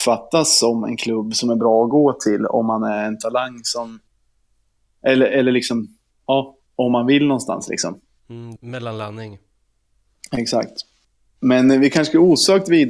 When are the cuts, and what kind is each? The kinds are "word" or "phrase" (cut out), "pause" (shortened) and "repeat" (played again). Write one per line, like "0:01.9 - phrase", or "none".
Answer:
0:06.7 - pause
0:08.6 - phrase

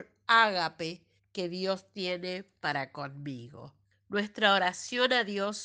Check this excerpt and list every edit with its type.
0:01.2 - pause
0:03.9 - pause

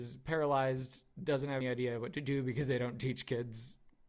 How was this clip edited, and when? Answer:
0:01.6 - word

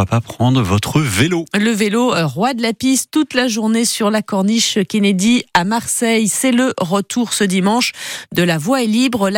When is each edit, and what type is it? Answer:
none

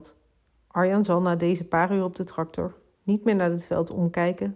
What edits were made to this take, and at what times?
none

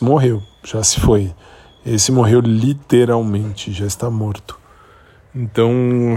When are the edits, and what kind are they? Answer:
none

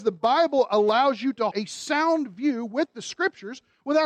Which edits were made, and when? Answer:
0:01.5 - word

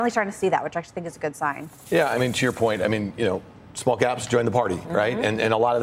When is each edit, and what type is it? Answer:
none

